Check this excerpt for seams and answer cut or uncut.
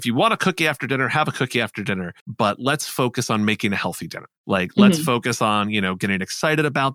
cut